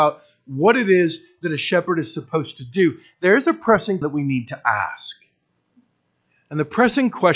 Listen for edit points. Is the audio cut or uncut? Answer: cut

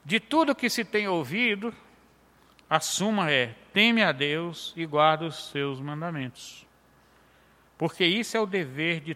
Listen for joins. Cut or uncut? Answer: uncut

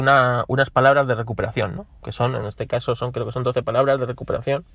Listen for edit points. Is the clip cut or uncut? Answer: uncut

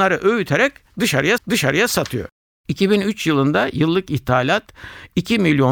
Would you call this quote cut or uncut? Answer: cut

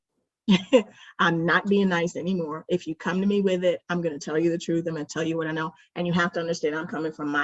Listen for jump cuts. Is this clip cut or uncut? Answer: uncut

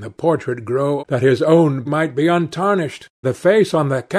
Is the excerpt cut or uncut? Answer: cut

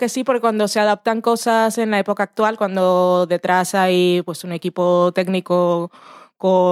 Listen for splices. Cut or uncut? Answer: uncut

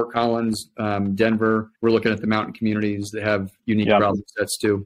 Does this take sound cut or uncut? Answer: cut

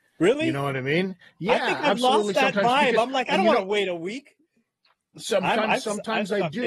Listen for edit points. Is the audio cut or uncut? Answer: uncut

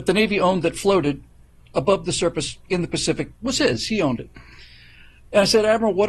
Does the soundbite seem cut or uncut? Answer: cut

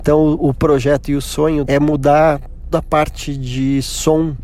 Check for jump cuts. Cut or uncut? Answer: cut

